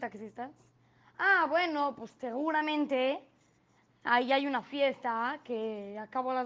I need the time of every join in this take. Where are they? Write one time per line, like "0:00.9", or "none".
none

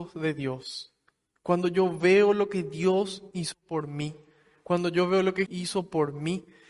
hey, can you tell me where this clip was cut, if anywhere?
0:05.5

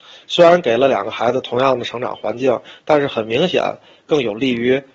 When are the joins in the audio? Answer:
none

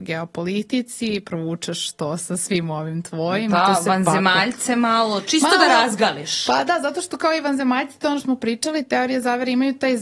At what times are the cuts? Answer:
0:08.2

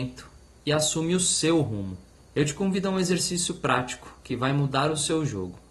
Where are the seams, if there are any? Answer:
0:02.1

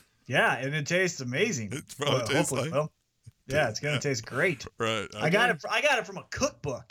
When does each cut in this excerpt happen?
none

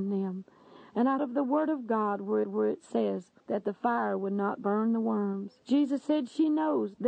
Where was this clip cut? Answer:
0:01.2
0:02.4
0:03.4
0:05.6

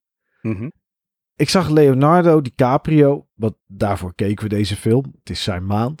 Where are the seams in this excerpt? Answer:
none

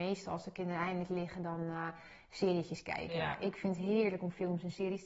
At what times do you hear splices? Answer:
none

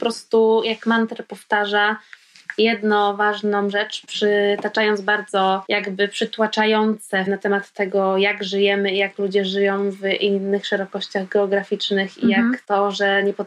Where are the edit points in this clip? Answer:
0:07.3

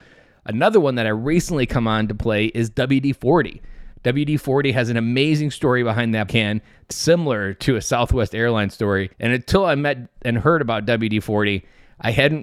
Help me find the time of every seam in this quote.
0:06.3
0:06.9
0:09.1

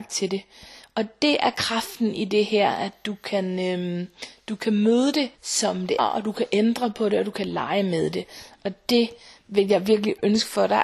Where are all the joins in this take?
0:05.3
0:06.0

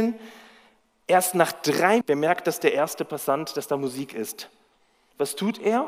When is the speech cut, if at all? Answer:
0:02.0

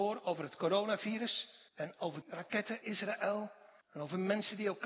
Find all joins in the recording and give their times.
0:01.7
0:02.2
0:02.8
0:03.8

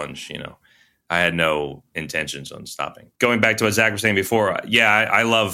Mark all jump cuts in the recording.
0:03.2

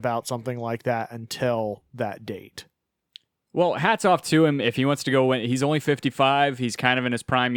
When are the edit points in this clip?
none

